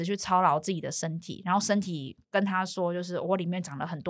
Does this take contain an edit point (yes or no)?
yes